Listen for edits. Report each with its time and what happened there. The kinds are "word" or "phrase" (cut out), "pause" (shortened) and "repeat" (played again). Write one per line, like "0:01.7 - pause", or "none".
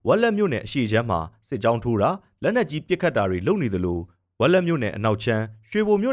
none